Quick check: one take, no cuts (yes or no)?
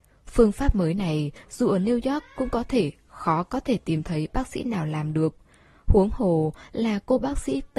yes